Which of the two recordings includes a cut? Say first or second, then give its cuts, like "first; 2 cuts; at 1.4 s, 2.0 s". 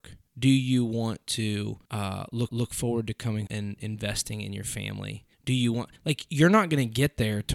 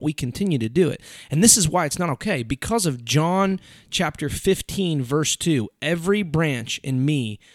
first; 5 cuts; at 1.8 s, 2.5 s, 3.5 s, 5.3 s, 6.0 s